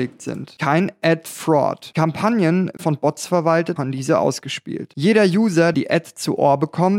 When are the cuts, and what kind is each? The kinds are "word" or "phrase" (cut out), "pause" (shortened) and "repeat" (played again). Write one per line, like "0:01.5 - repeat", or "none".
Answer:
0:02.8 - phrase
0:03.8 - word
0:05.7 - word